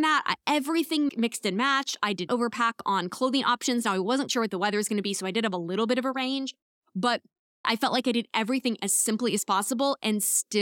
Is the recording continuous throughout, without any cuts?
no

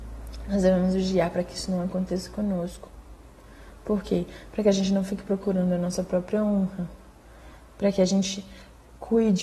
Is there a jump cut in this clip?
no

